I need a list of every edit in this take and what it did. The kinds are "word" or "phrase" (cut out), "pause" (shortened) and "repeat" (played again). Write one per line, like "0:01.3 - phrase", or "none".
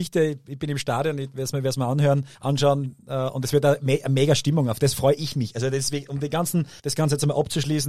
0:02.3 - pause
0:06.8 - pause